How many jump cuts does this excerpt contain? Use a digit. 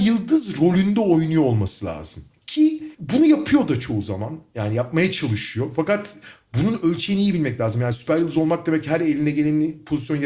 1